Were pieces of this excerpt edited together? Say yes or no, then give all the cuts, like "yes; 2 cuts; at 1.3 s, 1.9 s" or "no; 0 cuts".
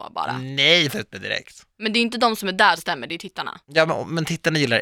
yes; 4 cuts; at 0.9 s, 1.7 s, 2.8 s, 3.6 s